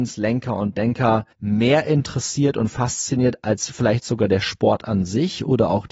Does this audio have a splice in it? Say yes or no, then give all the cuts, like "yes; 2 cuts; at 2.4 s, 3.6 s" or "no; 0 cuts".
yes; 1 cut; at 1.3 s